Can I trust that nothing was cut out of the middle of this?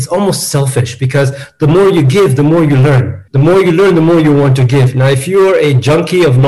no; 1 cut; at 3.3 s

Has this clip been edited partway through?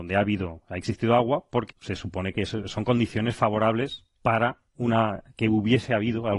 yes; 2 cuts; at 1.7 s, 4.2 s

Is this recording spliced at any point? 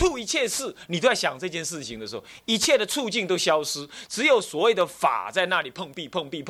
yes; 1 cut; at 4.1 s

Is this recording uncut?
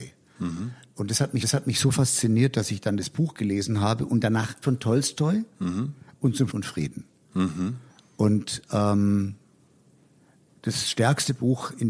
no; 4 cuts; at 1.4 s, 4.6 s, 6.5 s, 7.9 s

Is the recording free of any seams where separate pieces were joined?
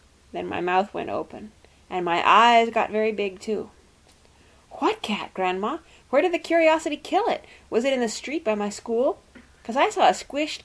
yes; 0 cuts

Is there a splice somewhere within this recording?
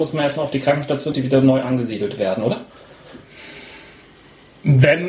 yes; 1 cut; at 1.1 s

